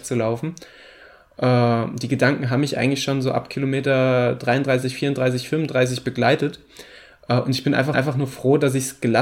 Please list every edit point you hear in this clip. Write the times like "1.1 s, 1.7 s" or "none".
7.9 s